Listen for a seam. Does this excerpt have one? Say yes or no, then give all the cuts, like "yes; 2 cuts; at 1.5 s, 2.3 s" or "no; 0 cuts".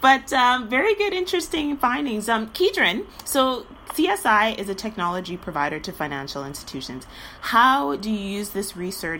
no; 0 cuts